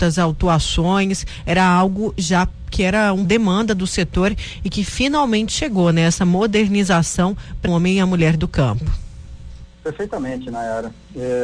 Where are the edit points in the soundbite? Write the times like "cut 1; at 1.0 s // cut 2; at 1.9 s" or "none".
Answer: cut 1; at 3.3 s // cut 2; at 7.7 s // cut 3; at 9.7 s